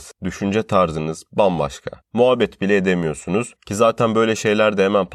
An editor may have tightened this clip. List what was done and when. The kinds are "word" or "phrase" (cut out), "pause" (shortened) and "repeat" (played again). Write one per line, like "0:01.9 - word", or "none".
none